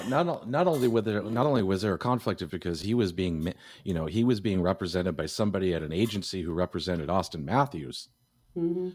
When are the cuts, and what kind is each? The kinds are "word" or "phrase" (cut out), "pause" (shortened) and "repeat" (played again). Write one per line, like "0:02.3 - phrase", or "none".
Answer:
0:02.5 - word